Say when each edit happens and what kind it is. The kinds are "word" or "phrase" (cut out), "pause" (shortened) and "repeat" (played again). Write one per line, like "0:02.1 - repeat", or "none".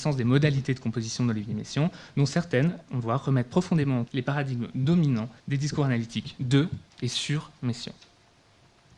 0:03.0 - word
0:04.1 - word
0:05.4 - pause